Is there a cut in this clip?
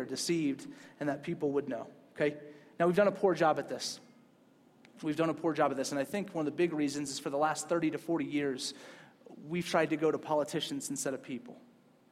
no; 0 cuts

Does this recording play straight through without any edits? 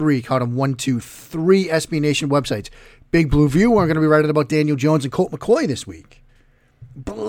yes; 0 cuts

